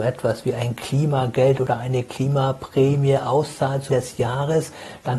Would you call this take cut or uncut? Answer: cut